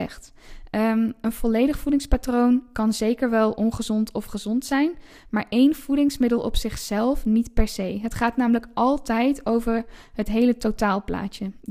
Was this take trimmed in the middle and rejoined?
no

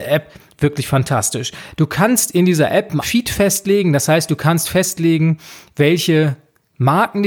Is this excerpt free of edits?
no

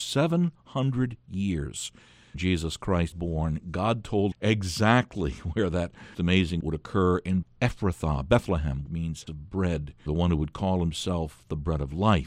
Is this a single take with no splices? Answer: no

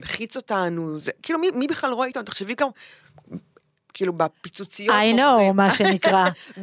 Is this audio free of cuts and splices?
yes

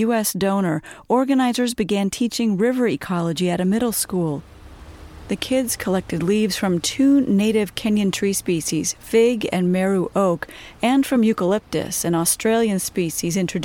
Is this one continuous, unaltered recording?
yes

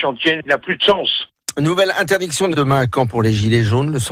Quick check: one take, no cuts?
no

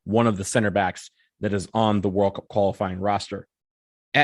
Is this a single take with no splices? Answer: yes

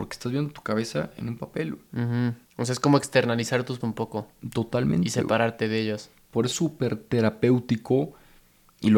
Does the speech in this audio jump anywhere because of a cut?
yes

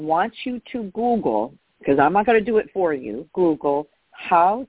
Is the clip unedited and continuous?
no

